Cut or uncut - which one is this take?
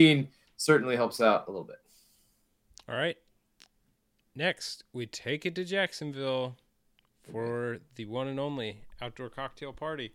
uncut